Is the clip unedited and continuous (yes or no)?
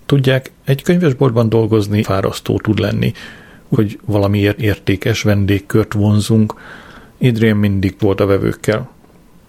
no